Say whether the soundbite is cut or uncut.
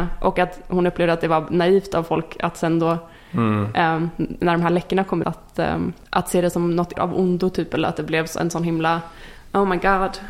cut